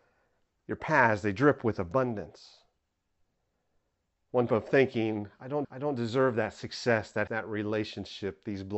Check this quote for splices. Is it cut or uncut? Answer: cut